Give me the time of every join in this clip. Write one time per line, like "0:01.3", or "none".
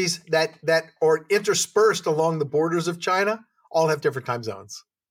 none